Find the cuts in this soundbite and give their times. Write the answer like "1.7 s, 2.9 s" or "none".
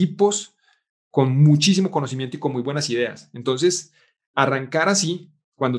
none